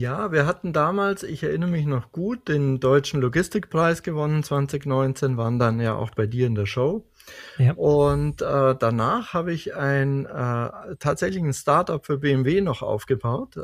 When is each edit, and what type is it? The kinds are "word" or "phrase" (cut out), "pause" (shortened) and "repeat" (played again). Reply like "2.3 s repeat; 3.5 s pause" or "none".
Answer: none